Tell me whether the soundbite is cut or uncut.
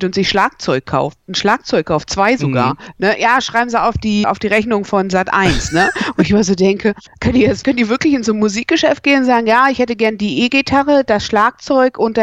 cut